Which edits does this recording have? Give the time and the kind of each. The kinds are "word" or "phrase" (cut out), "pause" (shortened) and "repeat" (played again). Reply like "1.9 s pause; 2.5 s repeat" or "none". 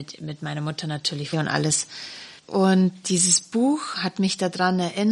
1.3 s phrase; 2.4 s pause

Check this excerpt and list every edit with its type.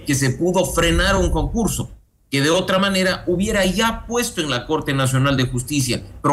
none

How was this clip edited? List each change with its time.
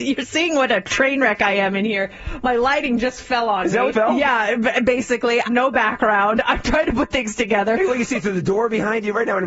3.9 s word; 5.5 s word

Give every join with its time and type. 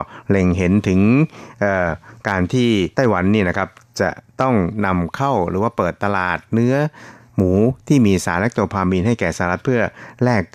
2.9 s pause

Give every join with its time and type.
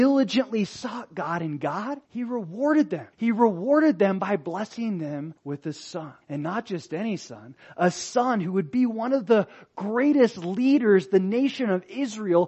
2.0 s pause; 3.1 s pause; 5.4 s pause; 6.2 s pause

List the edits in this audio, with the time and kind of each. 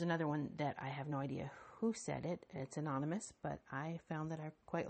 none

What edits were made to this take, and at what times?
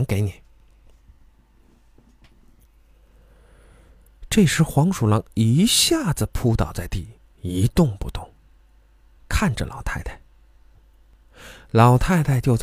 none

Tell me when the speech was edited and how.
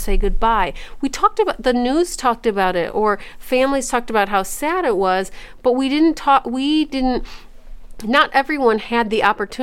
none

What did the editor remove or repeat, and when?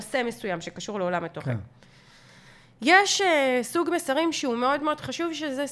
none

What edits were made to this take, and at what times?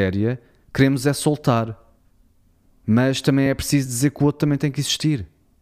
none

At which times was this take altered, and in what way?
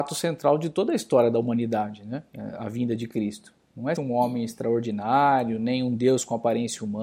4.0 s word

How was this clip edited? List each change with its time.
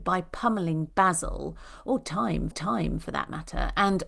2.5 s repeat

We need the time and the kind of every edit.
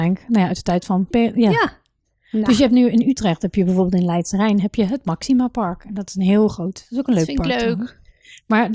1.1 s word

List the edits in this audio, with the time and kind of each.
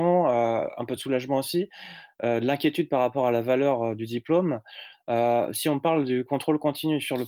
none

